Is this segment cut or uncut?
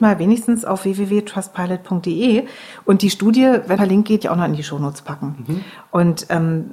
cut